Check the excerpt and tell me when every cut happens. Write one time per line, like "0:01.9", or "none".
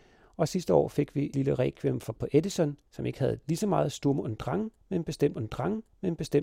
0:01.3
0:02.1
0:02.9
0:05.3